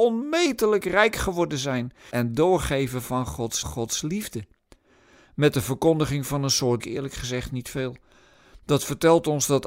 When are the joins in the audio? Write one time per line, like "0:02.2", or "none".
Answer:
0:02.1
0:03.6
0:06.8